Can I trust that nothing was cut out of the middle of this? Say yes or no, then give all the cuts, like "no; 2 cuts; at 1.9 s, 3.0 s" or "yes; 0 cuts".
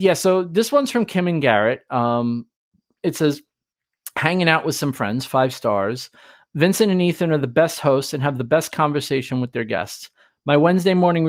yes; 0 cuts